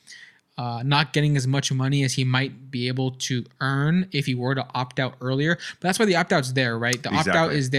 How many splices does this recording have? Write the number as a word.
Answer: zero